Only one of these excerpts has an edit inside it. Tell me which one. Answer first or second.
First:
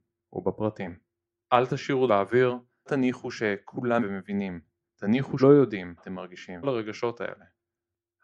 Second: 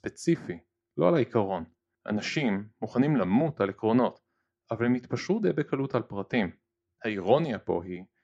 first